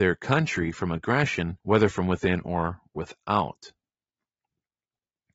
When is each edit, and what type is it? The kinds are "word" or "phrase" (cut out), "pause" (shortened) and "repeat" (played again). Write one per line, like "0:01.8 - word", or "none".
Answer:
0:01.6 - pause